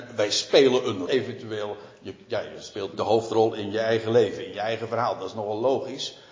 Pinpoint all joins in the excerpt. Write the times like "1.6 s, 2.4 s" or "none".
1.1 s, 2.9 s